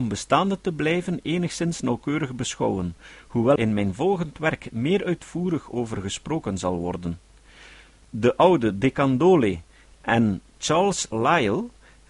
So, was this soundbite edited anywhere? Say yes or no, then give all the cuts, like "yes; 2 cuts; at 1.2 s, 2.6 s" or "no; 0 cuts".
yes; 1 cut; at 3.6 s